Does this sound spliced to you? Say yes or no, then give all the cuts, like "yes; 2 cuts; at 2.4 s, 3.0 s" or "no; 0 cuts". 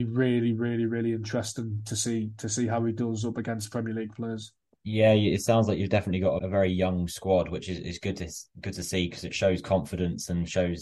yes; 1 cut; at 6.4 s